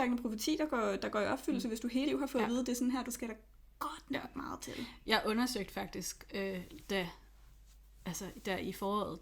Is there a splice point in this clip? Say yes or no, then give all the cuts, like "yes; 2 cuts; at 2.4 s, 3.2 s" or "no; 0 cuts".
yes; 2 cuts; at 2.0 s, 3.0 s